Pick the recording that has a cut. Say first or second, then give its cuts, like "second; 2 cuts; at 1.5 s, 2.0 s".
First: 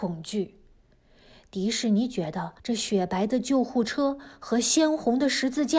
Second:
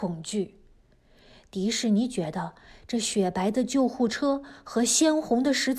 first; 1 cut; at 2.6 s